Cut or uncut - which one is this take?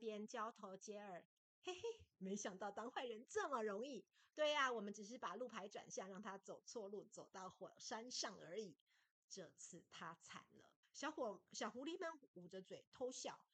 cut